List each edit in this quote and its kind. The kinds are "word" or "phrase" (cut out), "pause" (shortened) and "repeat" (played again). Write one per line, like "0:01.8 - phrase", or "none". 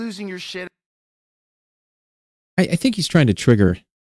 none

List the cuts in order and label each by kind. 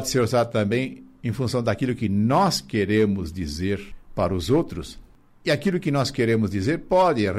none

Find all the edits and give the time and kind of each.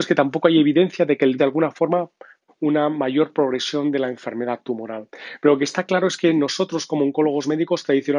0:01.4 - word
0:02.5 - word

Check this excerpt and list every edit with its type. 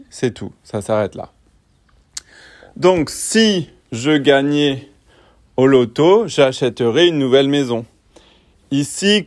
none

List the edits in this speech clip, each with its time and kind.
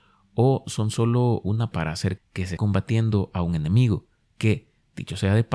0:01.7 - word
0:02.2 - word
0:02.6 - word

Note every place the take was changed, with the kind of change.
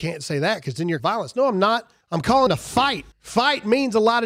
0:01.0 - phrase
0:02.0 - pause
0:02.5 - word
0:03.1 - pause

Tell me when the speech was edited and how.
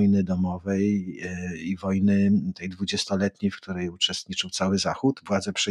none

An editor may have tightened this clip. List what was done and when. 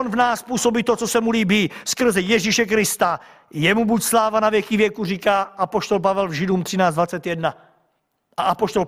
none

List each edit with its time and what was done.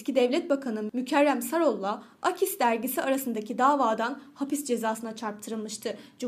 none

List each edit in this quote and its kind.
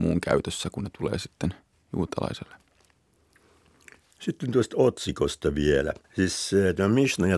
0:01.7 - pause
0:06.0 - pause

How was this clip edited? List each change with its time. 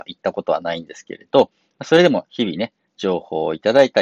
none

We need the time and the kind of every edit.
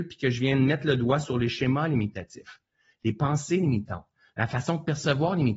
none

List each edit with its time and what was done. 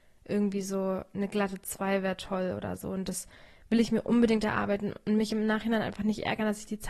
none

